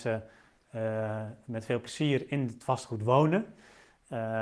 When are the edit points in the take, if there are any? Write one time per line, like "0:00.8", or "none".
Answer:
none